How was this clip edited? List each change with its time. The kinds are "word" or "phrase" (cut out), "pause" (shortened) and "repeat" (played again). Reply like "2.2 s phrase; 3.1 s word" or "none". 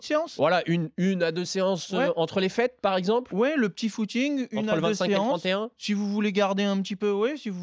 none

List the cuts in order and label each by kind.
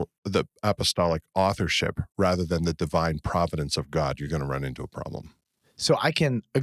none

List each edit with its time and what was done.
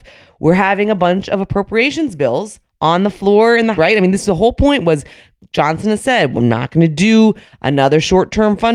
3.7 s word

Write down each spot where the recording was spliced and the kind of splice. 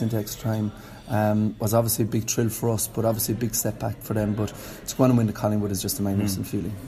none

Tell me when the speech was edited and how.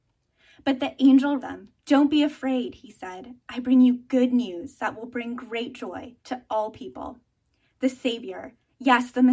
1.4 s word; 1.8 s pause; 6.2 s pause

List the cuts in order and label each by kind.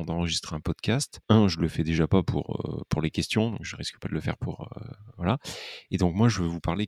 1.2 s pause

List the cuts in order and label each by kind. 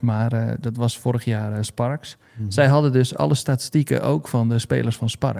2.3 s pause

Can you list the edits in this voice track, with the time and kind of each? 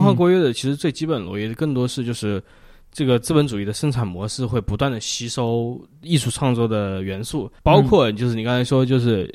7.6 s pause

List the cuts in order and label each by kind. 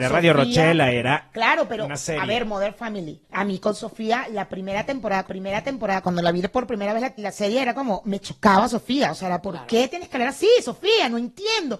3.2 s pause; 5.3 s repeat; 7.2 s word

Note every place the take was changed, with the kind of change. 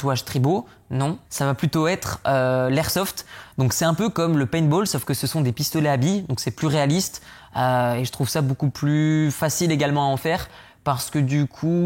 1.2 s pause

